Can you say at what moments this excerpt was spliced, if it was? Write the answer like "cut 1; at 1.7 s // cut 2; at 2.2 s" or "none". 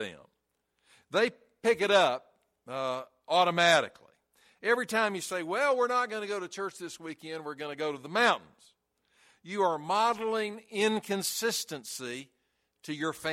none